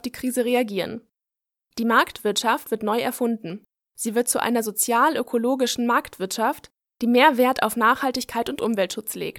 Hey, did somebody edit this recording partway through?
yes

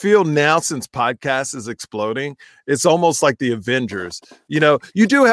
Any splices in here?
no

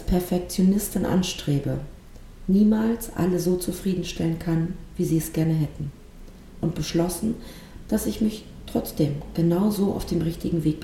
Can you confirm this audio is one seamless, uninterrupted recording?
yes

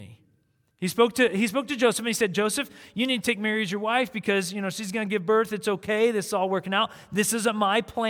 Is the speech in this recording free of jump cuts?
yes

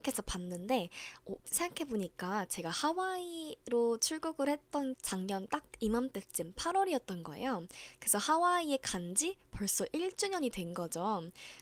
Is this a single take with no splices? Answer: no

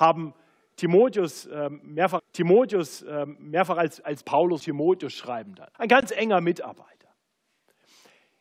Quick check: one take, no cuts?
no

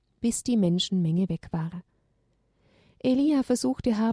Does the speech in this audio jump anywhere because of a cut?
no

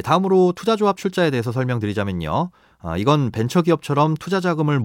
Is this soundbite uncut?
yes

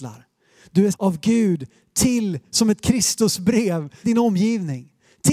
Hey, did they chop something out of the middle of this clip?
yes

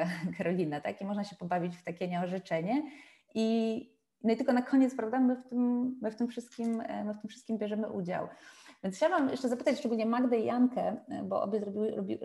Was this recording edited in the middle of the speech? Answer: no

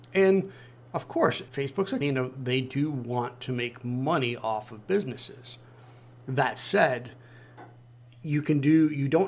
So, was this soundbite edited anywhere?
yes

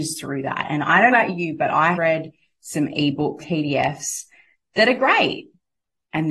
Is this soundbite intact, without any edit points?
no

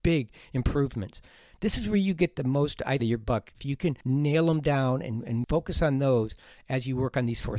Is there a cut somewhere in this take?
yes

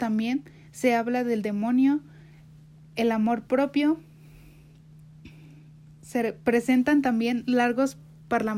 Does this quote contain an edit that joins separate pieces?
no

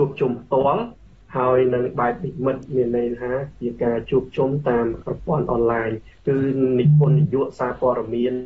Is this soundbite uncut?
yes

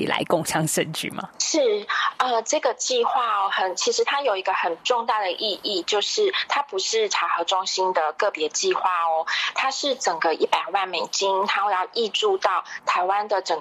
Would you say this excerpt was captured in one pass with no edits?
no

